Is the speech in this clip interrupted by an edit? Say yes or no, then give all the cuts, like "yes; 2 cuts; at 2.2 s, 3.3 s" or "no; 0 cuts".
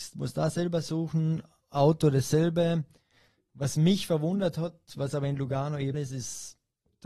yes; 1 cut; at 5.9 s